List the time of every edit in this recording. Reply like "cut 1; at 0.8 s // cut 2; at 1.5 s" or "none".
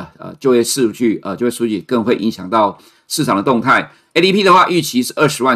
none